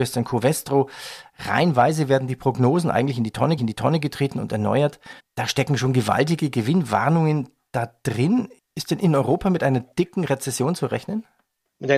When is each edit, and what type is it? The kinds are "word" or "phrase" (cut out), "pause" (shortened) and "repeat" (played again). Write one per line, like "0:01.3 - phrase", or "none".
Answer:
0:03.6 - repeat
0:05.2 - pause